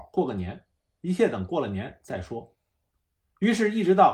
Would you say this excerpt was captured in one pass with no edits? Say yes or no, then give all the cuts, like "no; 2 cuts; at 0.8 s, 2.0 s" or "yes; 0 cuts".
yes; 0 cuts